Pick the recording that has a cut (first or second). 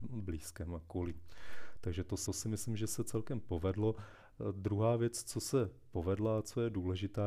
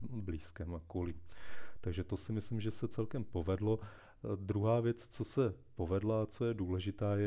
first